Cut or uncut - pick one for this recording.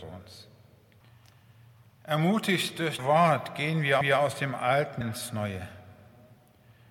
cut